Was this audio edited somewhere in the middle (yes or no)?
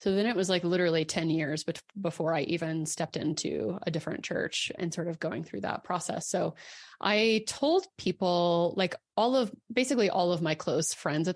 yes